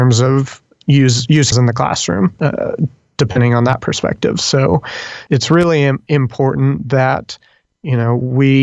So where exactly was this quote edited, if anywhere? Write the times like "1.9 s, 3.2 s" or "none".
1.5 s, 5.3 s

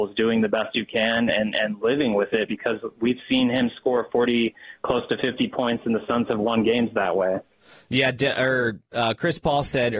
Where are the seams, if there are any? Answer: none

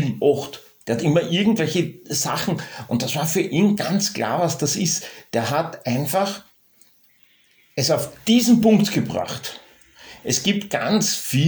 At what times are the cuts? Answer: none

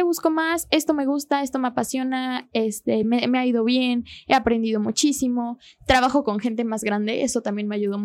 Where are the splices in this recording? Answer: none

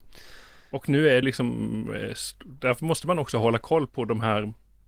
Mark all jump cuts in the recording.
1.2 s

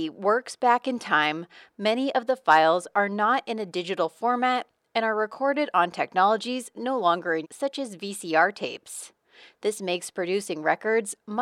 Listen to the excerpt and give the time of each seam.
7.4 s

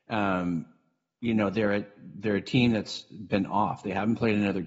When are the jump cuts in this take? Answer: none

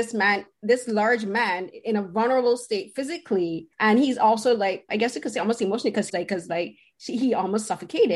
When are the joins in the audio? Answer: 3.7 s, 4.9 s, 6.1 s

